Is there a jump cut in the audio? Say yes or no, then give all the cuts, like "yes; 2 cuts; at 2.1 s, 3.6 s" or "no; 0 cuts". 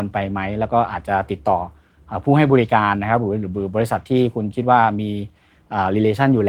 no; 0 cuts